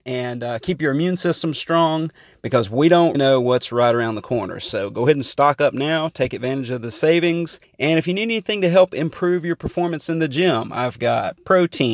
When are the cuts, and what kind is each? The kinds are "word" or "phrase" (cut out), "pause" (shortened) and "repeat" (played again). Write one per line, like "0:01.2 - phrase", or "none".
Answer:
0:03.1 - word
0:07.6 - pause